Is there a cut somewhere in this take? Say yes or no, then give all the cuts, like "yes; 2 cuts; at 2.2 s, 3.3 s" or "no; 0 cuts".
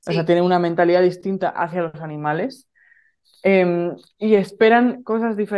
no; 0 cuts